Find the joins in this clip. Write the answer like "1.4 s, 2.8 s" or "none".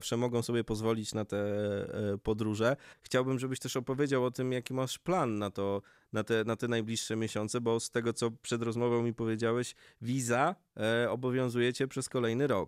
none